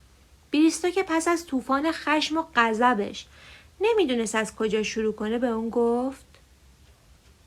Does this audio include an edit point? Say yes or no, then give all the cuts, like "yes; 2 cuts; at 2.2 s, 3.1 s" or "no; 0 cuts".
no; 0 cuts